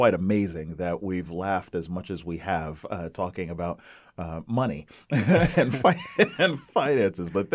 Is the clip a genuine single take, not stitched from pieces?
yes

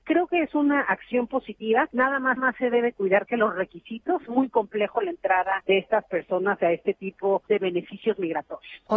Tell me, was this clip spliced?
yes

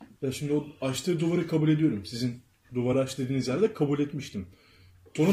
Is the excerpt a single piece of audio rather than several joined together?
yes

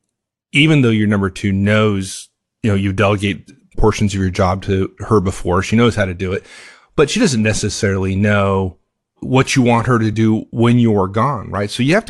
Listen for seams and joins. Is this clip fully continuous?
yes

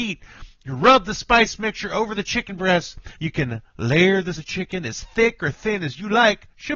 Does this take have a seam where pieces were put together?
yes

